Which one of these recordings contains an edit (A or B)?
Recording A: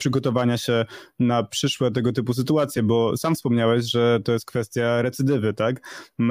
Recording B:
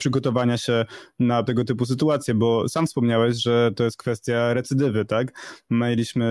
B